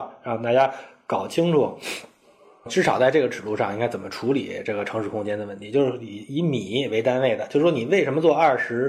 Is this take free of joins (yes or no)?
yes